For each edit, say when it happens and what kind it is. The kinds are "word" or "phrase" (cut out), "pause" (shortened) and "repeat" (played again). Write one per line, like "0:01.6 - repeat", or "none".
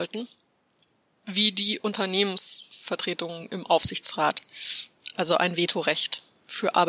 none